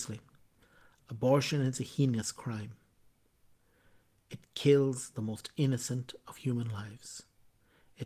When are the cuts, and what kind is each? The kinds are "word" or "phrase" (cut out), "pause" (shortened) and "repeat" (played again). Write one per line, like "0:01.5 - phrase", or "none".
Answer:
none